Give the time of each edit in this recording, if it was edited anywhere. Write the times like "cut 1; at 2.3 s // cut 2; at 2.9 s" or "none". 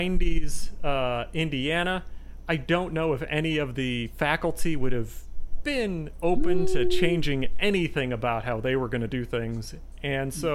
none